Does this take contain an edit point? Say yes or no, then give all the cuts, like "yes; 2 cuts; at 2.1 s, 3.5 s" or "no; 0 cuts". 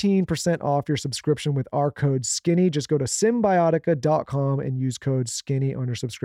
no; 0 cuts